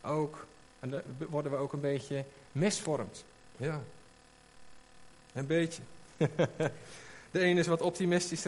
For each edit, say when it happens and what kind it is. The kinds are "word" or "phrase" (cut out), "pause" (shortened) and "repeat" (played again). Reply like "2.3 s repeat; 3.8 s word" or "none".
none